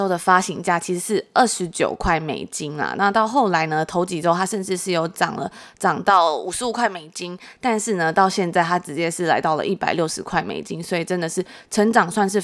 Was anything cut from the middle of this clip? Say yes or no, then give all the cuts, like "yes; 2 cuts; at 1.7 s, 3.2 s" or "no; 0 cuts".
no; 0 cuts